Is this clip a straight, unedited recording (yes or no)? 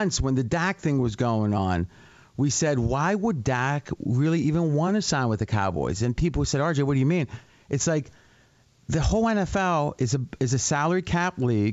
yes